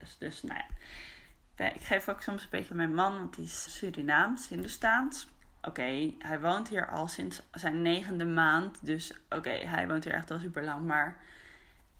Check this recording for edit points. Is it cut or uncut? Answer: cut